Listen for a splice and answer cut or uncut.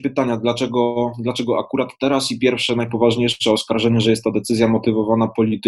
uncut